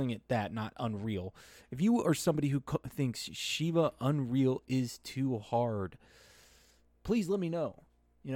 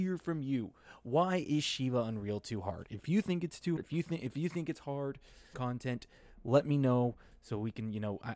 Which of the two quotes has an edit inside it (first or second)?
second